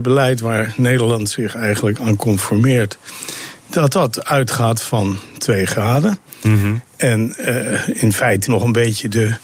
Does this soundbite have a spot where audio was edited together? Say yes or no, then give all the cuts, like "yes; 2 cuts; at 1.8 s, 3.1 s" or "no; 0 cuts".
yes; 1 cut; at 8.5 s